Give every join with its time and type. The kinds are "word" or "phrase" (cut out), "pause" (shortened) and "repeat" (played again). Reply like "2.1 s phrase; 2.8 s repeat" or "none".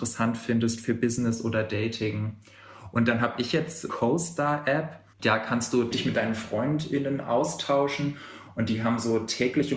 3.9 s phrase; 5.1 s pause

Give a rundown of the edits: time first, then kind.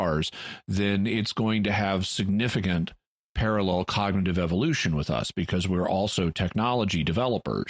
none

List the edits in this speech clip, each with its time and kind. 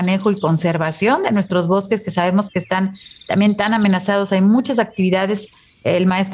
none

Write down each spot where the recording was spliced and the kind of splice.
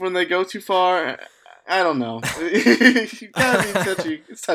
none

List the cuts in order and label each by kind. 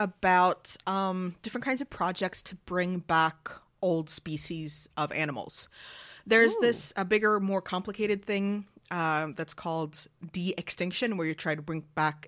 none

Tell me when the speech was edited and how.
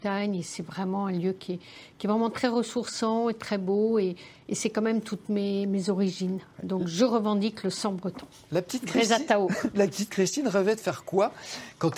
none

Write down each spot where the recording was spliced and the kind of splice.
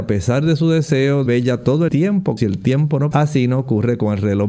1.3 s phrase; 1.9 s word; 2.4 s word; 3.1 s word

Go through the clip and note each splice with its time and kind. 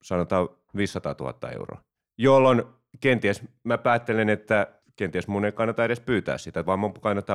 none

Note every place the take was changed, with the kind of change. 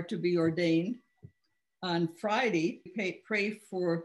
2.9 s word

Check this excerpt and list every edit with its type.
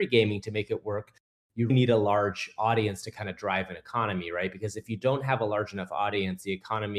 1.7 s word

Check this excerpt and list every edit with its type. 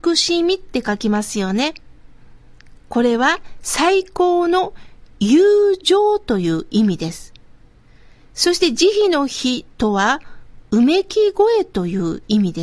none

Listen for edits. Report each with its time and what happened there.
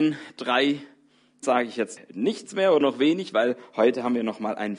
1.4 s word; 2.0 s word; 2.8 s word

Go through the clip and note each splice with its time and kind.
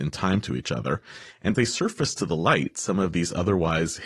1.5 s word

